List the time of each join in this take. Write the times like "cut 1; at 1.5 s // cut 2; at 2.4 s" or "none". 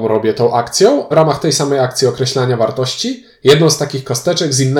cut 1; at 1.1 s

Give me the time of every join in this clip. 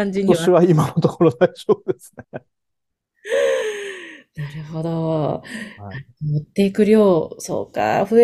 cut 1; at 2.2 s

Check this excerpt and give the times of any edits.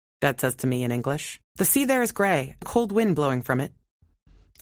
cut 1; at 1.5 s // cut 2; at 2.6 s

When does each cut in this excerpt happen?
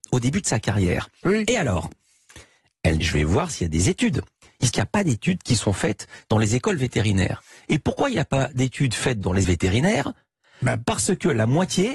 cut 1; at 3.0 s // cut 2; at 4.7 s // cut 3; at 9.4 s

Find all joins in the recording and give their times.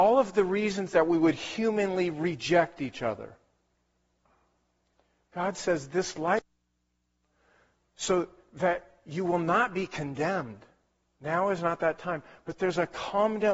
none

